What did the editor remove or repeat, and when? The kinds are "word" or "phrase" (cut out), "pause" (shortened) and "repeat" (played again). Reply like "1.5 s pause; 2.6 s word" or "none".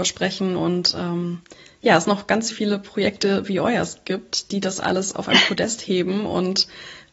2.5 s word